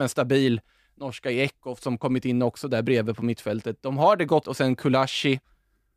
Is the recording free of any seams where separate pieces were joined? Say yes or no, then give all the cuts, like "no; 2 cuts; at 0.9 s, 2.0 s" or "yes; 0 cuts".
no; 1 cut; at 4.4 s